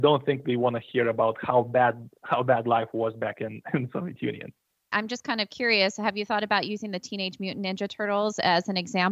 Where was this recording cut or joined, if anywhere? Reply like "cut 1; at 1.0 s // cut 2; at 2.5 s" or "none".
none

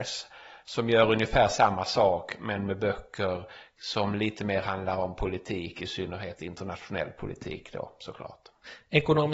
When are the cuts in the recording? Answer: none

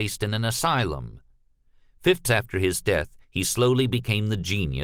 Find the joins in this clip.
cut 1; at 2.2 s // cut 2; at 3.2 s

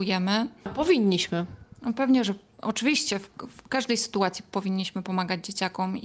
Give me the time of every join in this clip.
none

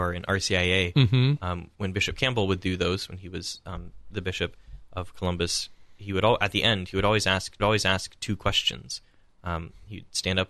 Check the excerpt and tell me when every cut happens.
cut 1; at 1.7 s // cut 2; at 7.6 s

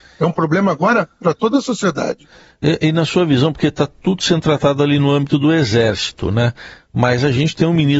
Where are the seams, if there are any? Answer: none

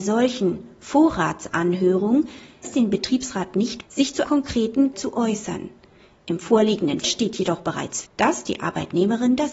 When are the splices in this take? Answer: cut 1; at 2.6 s // cut 2; at 3.8 s // cut 3; at 4.2 s // cut 4; at 4.9 s // cut 5; at 7.0 s // cut 6; at 8.0 s

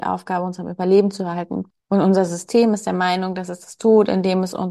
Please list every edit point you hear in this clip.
cut 1; at 1.7 s

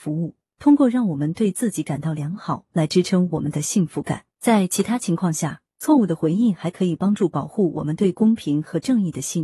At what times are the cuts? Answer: cut 1; at 4.3 s

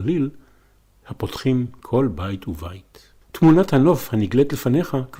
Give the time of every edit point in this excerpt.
cut 1; at 3.2 s

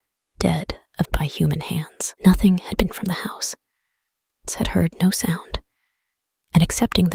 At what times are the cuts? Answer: cut 1; at 1.0 s // cut 2; at 2.2 s // cut 3; at 2.9 s // cut 4; at 4.5 s

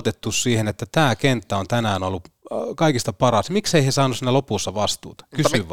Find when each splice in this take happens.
none

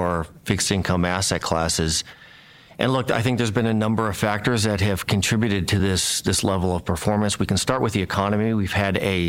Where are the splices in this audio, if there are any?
none

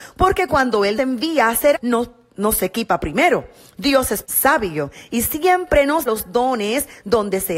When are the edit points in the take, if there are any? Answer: cut 1; at 1.0 s // cut 2; at 1.7 s // cut 3; at 4.2 s // cut 4; at 6.1 s

